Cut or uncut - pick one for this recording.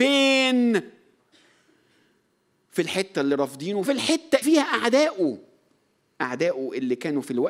cut